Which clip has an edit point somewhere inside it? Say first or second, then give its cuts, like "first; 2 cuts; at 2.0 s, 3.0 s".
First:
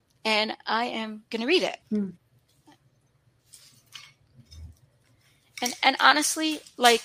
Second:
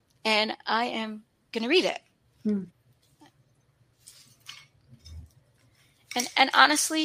first; 2 cuts; at 1.3 s, 1.8 s